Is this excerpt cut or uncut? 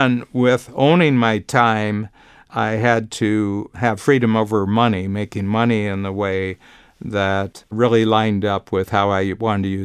uncut